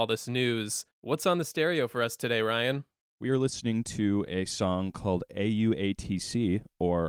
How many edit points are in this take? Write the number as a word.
one